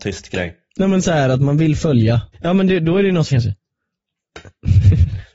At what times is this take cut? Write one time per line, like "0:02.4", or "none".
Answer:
0:02.3
0:03.3